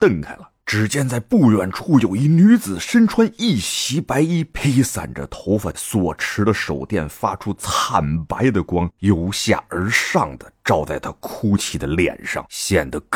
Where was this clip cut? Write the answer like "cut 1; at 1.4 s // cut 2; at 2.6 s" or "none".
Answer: cut 1; at 5.7 s